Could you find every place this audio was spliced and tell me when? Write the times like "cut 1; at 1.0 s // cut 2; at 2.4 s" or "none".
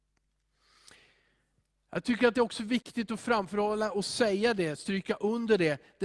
none